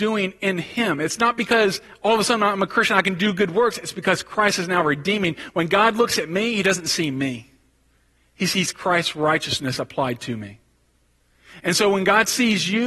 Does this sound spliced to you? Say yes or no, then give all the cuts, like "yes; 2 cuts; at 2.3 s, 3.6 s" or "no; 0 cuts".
no; 0 cuts